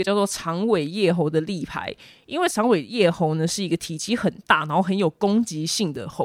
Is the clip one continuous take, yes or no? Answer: yes